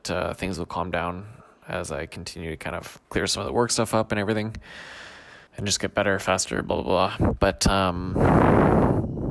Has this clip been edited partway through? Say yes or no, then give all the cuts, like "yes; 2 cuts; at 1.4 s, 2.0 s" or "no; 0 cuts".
yes; 2 cuts; at 3.0 s, 5.5 s